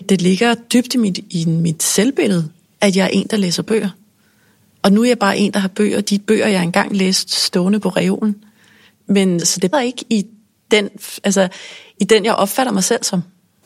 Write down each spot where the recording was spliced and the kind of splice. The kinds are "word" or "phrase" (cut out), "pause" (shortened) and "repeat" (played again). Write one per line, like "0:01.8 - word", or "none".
0:09.4 - word
0:09.7 - word